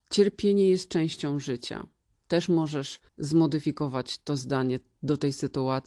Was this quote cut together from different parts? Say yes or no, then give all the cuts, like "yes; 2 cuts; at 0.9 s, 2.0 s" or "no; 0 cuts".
yes; 1 cut; at 3.1 s